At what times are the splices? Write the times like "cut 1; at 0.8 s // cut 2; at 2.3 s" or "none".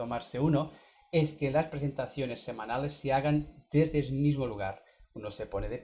none

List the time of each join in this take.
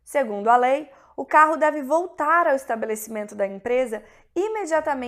none

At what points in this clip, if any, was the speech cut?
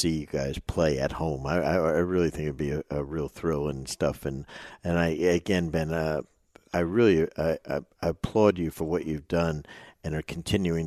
none

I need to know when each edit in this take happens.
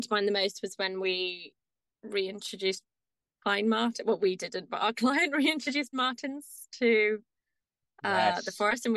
cut 1; at 5.9 s

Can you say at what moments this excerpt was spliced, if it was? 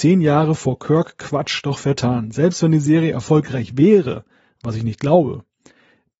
none

